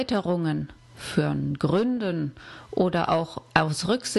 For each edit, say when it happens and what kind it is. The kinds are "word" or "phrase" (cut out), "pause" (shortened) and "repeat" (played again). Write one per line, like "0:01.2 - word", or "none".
none